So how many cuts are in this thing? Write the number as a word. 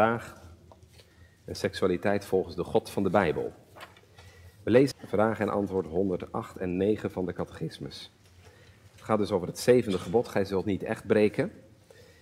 one